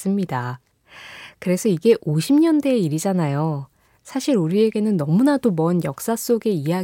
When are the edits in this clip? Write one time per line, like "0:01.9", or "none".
none